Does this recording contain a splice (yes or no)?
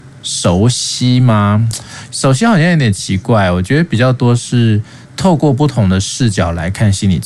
yes